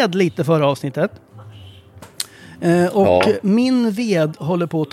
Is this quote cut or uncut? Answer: uncut